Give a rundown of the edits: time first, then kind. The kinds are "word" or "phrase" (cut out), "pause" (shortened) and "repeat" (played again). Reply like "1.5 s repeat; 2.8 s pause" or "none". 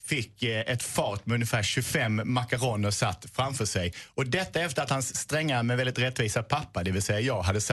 none